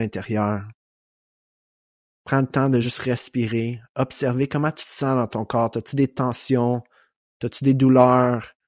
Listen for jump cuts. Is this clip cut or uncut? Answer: uncut